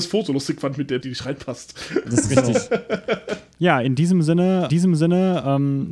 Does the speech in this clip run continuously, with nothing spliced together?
no; 2 cuts; at 1.0 s, 4.7 s

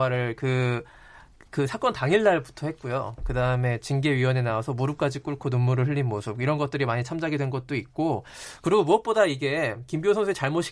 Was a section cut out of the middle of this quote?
no; 0 cuts

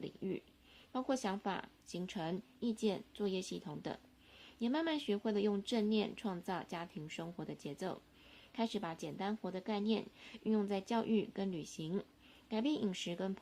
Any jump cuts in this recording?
no; 0 cuts

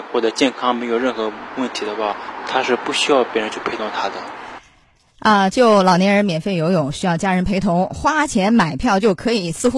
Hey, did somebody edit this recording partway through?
no; 0 cuts

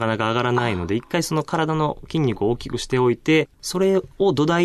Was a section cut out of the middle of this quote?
yes; 1 cut; at 3.5 s

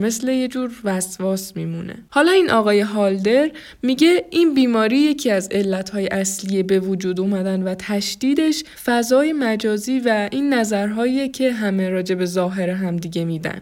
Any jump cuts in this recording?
yes; 2 cuts; at 2.1 s, 8.7 s

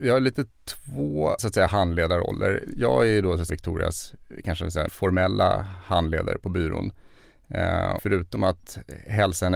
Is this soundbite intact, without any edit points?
no; 4 cuts; at 1.4 s, 3.5 s, 4.9 s, 8.0 s

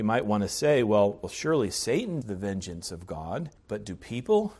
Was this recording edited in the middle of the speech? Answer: yes; 2 cuts; at 2.2 s, 3.6 s

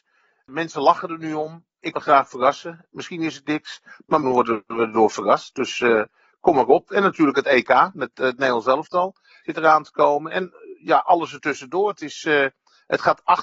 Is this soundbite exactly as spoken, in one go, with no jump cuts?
no; 2 cuts; at 1.9 s, 4.2 s

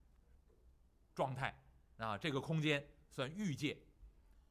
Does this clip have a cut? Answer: no; 0 cuts

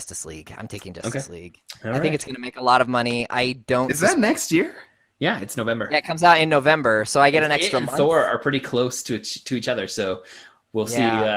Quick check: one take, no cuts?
yes; 0 cuts

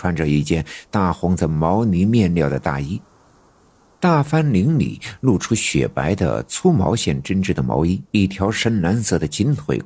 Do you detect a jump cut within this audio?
yes; 1 cut; at 8.1 s

